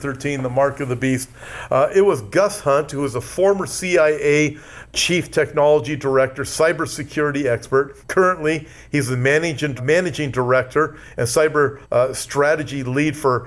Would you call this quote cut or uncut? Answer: cut